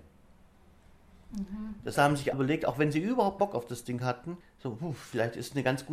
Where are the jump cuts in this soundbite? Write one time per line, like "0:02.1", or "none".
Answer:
0:01.9
0:02.3
0:03.4
0:04.4